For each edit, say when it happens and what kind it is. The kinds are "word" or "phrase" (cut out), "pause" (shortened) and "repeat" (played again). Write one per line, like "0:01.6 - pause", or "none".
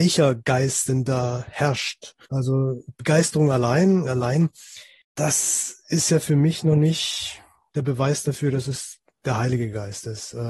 0:02.2 - pause
0:04.0 - phrase